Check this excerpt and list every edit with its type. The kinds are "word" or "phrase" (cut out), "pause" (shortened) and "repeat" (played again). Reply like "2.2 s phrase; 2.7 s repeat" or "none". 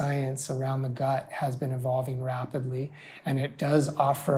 none